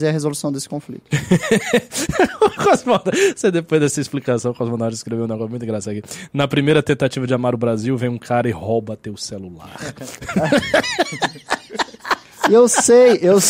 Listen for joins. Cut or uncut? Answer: uncut